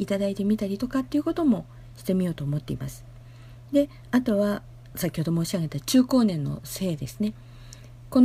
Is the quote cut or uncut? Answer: cut